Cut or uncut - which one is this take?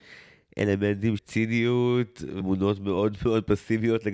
cut